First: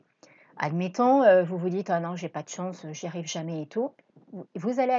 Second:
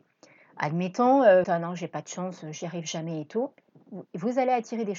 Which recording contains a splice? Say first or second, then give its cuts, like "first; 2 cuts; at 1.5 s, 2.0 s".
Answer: second; 1 cut; at 1.4 s